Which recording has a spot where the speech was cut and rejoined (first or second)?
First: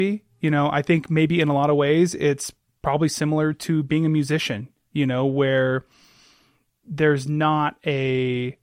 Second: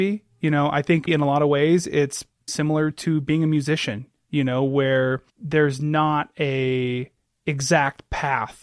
second